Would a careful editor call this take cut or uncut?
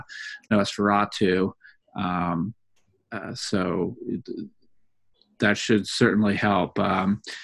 uncut